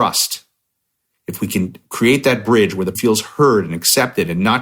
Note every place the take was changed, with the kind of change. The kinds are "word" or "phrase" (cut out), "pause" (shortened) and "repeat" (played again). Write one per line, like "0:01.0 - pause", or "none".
0:02.9 - word